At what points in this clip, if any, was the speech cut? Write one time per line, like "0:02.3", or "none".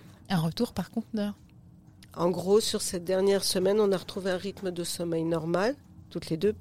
none

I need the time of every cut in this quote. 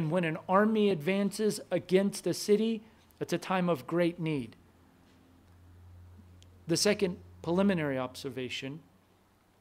none

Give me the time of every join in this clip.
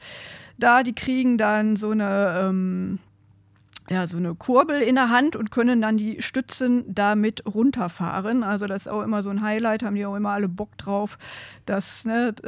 none

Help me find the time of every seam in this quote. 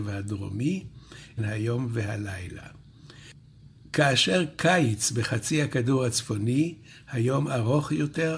0:01.4

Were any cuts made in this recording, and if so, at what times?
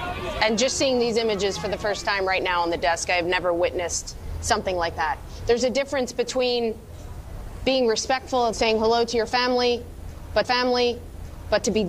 0:08.5
0:10.4

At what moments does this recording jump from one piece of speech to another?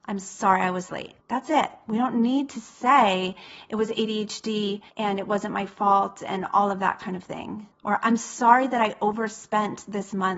0:01.2
0:04.9
0:07.7

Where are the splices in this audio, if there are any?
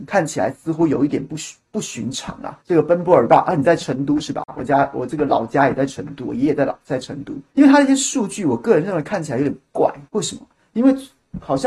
0:02.6
0:07.5
0:10.1

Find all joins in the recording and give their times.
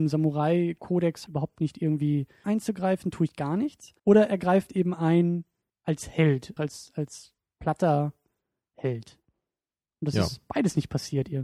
0:01.3
0:02.4
0:04.0
0:05.7
0:06.6

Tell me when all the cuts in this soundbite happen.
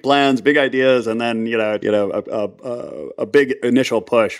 0:01.8

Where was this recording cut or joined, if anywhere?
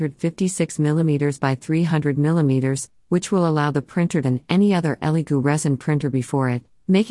0:04.2

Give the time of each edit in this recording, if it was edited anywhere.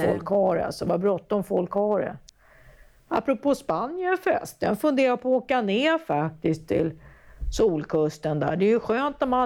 none

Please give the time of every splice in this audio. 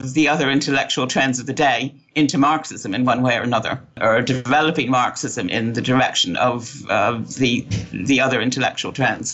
0:05.5

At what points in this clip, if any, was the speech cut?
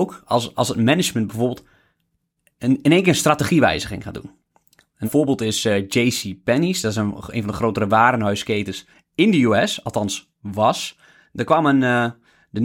0:05.0

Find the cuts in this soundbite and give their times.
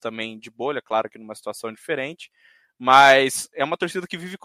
none

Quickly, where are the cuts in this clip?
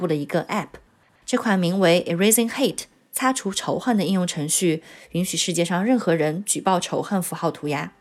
none

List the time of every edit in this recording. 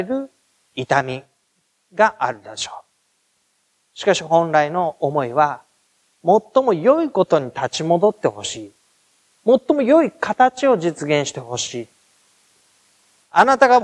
none

